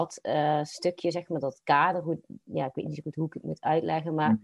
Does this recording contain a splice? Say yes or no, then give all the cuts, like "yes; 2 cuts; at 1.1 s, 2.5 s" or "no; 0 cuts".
no; 0 cuts